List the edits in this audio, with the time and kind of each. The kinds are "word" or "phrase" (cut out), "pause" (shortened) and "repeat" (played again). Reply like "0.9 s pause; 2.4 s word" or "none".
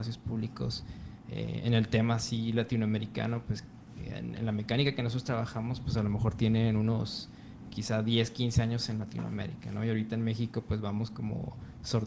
none